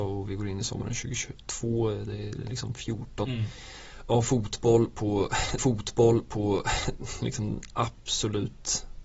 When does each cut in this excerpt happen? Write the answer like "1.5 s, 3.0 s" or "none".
3.2 s, 5.6 s